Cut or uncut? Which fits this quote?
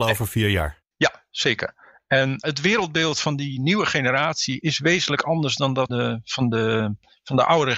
cut